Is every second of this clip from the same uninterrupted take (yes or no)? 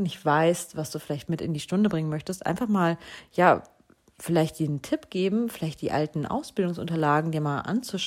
yes